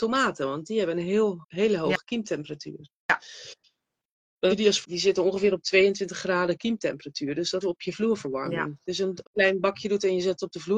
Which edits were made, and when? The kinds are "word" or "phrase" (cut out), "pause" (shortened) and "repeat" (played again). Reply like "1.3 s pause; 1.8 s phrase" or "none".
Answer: 1.4 s word; 4.5 s word; 4.8 s phrase; 7.6 s word; 9.2 s phrase